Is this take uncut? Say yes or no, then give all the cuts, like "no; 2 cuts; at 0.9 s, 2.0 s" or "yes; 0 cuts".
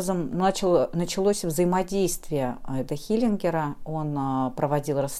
no; 1 cut; at 2.9 s